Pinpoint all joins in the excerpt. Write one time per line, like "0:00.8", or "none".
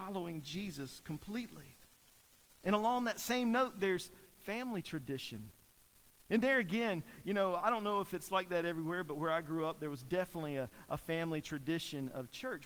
none